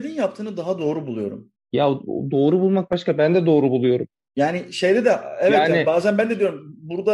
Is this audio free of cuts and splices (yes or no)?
yes